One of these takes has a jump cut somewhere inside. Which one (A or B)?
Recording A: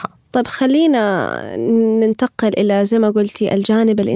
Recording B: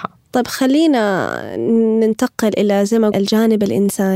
B